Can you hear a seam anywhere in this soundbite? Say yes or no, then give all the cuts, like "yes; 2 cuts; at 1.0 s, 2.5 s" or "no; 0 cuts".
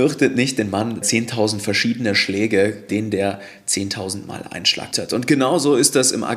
yes; 3 cuts; at 1.0 s, 2.9 s, 4.9 s